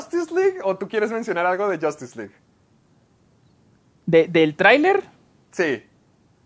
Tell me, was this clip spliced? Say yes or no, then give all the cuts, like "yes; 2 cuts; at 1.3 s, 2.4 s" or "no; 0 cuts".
no; 0 cuts